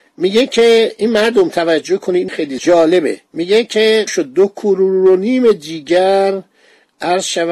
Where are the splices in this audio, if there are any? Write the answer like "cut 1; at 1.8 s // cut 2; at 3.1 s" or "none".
cut 1; at 2.3 s // cut 2; at 4.1 s